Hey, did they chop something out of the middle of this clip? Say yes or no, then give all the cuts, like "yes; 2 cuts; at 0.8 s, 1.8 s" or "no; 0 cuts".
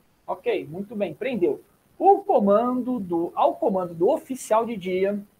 no; 0 cuts